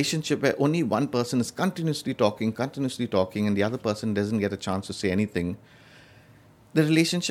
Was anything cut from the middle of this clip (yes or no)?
no